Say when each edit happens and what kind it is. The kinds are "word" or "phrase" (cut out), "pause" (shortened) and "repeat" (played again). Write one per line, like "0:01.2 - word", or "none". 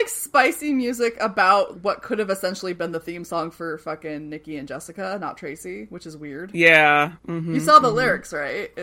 0:01.7 - word